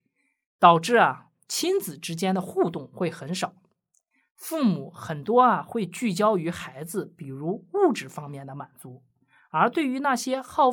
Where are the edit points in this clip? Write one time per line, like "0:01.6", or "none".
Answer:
none

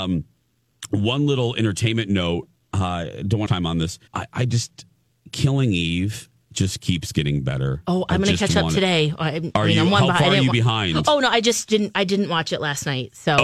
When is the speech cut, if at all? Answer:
0:03.5
0:04.1

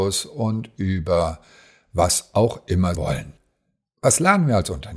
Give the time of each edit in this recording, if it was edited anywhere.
0:02.9

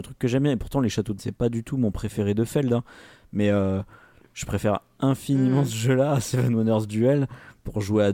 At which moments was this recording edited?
0:01.2

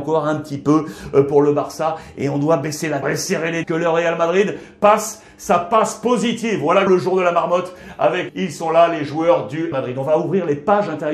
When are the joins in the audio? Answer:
0:03.0
0:03.6
0:06.9
0:08.3
0:09.7

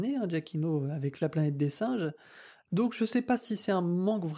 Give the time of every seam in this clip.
none

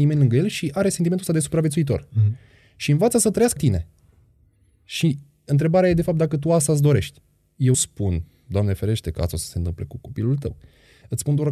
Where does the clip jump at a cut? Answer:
0:03.6
0:07.7

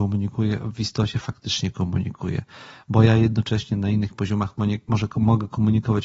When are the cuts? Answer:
none

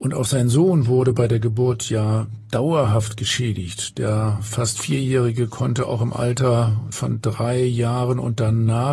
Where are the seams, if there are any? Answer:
0:06.9

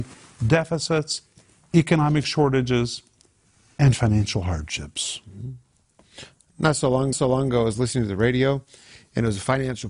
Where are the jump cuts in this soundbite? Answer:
0:07.1

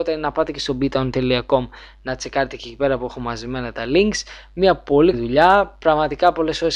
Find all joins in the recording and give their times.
0:05.1

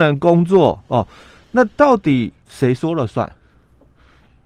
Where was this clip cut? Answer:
0:02.4

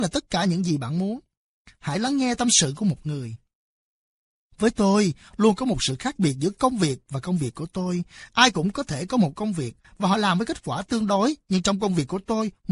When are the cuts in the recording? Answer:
none

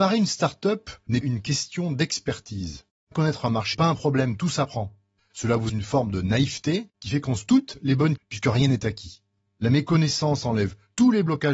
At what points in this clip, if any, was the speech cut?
0:01.2
0:03.1
0:03.7
0:05.2
0:05.7
0:07.5
0:08.2

